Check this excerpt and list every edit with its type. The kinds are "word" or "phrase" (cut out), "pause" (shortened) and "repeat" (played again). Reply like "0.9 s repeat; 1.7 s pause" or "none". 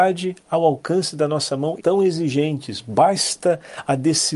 1.8 s phrase